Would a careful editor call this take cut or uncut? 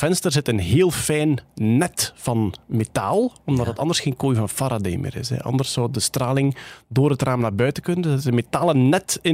uncut